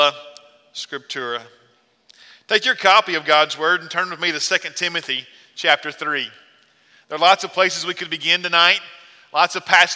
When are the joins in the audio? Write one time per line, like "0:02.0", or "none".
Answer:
none